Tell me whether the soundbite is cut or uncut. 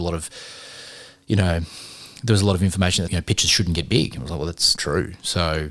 cut